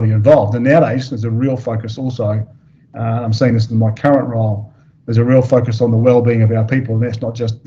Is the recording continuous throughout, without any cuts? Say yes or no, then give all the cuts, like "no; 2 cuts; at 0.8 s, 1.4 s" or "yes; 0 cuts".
yes; 0 cuts